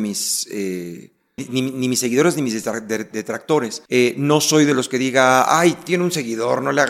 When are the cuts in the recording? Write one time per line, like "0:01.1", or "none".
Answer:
0:01.4
0:03.9